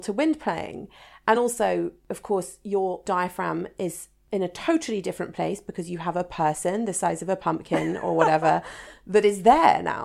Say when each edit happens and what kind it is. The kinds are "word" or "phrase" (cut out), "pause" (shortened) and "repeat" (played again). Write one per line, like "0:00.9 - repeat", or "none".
none